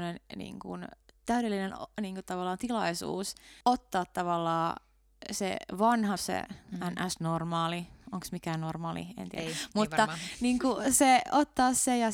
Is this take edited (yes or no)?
yes